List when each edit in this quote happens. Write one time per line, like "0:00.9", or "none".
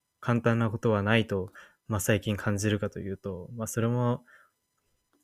none